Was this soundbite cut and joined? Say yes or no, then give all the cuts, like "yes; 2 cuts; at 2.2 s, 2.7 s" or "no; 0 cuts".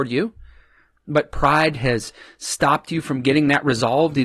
no; 0 cuts